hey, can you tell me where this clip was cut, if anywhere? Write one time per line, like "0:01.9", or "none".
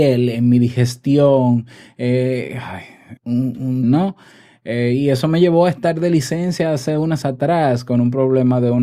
0:03.2
0:03.8
0:07.2